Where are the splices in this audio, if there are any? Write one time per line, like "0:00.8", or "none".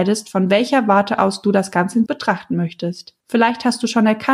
0:02.1
0:03.2